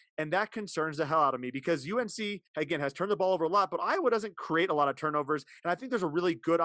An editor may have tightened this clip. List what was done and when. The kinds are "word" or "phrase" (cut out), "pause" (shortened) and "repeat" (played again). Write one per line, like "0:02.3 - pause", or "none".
0:02.5 - pause